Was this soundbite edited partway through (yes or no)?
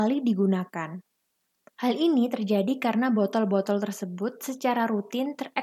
no